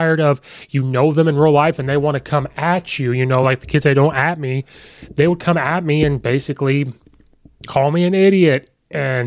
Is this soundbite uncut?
yes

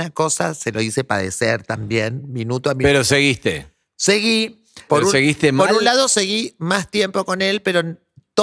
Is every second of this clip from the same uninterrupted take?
no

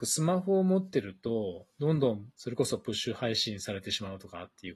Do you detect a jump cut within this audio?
yes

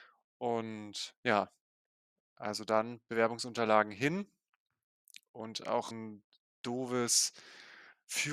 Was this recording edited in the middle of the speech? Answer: yes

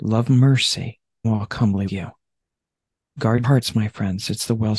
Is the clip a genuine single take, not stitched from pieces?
no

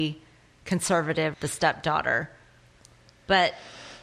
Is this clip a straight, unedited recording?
no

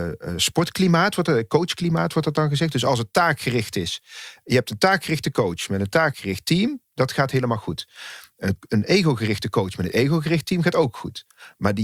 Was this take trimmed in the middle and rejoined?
no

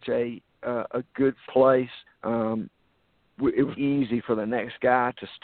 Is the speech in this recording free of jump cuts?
no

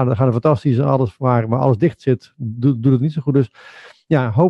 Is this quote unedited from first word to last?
yes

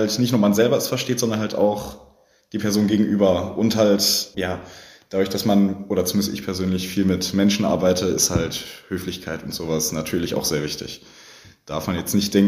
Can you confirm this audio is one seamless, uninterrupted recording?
yes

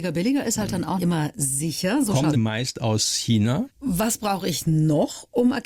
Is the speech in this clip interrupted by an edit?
yes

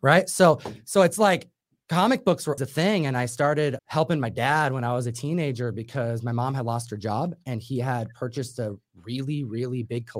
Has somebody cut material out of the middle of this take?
yes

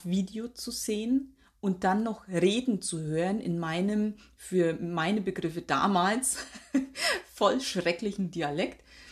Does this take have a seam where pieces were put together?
no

